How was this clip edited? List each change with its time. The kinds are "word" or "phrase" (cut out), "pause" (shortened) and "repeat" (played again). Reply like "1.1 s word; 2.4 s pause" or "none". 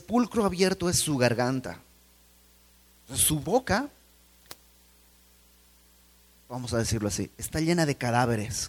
3.4 s word